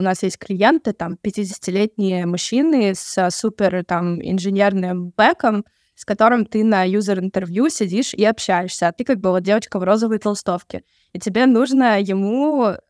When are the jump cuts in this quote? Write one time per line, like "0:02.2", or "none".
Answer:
none